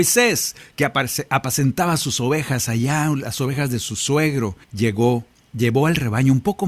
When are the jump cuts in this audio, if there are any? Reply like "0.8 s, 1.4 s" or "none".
4.6 s